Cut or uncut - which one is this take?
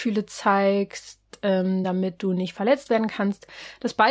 uncut